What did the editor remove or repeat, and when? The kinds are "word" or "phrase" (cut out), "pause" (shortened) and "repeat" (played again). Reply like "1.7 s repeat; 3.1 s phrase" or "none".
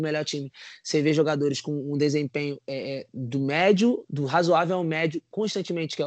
none